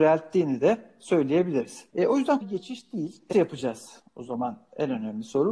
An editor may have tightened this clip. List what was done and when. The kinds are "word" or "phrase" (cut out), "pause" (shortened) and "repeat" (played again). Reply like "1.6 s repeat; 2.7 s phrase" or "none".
1.9 s pause; 2.4 s word; 3.3 s word